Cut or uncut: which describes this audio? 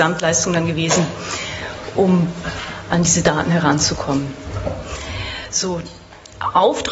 uncut